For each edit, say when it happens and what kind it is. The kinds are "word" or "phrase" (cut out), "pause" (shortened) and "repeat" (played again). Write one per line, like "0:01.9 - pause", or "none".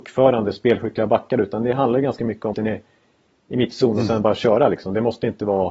0:02.5 - phrase